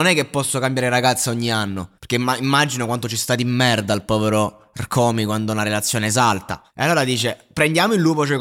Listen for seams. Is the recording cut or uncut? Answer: cut